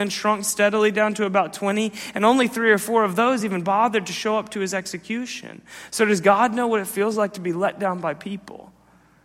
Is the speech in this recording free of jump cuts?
yes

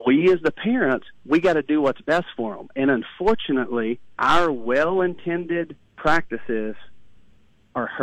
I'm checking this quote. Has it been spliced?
yes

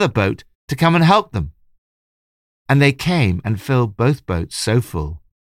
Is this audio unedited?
yes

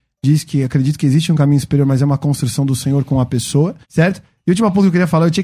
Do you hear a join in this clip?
yes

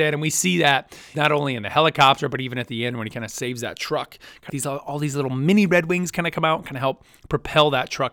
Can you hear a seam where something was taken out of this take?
yes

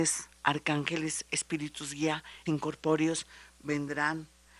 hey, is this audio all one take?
no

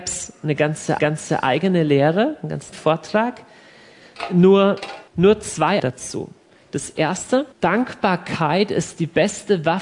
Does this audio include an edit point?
yes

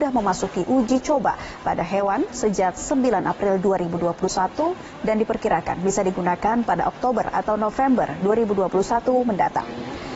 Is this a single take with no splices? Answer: yes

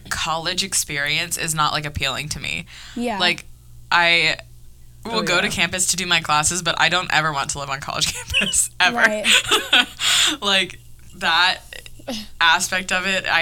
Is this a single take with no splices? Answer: yes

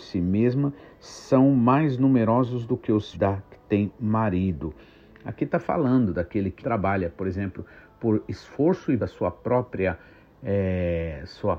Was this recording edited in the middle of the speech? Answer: yes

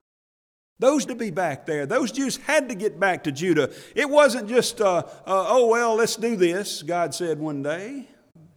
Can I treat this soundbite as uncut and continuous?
no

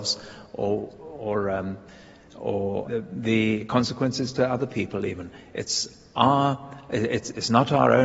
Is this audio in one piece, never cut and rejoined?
no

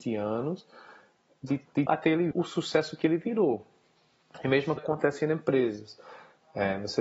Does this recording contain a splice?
yes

